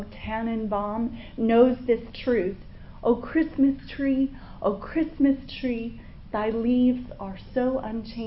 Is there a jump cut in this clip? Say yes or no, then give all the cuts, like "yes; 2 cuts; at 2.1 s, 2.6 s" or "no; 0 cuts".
no; 0 cuts